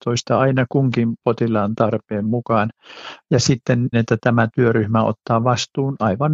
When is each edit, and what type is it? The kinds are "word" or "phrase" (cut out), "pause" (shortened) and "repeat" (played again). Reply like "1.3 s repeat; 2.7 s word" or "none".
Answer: 3.9 s word